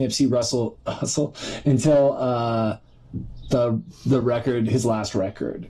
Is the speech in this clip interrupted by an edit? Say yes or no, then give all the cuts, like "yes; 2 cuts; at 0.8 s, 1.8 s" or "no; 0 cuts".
no; 0 cuts